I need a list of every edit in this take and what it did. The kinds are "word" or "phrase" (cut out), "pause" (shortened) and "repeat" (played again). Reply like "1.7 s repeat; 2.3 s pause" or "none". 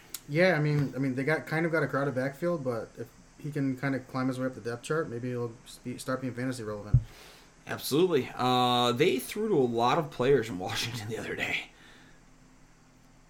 none

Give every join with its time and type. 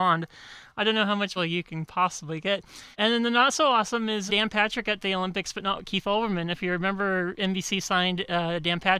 1.4 s phrase; 2.9 s pause; 4.3 s word

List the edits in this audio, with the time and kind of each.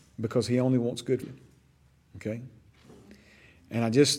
1.2 s word

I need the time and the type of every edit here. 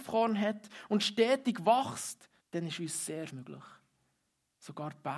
2.4 s pause; 3.3 s word

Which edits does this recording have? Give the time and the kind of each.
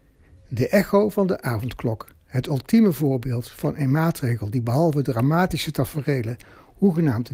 none

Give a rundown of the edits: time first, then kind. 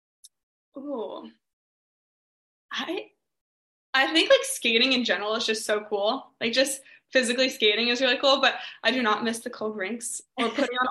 none

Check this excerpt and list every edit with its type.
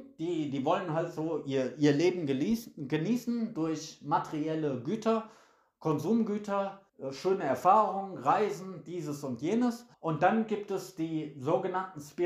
6.9 s pause; 9.9 s pause

